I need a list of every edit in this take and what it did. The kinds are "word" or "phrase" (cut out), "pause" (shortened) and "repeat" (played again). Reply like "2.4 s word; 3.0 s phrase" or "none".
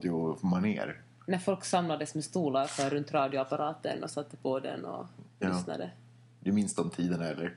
none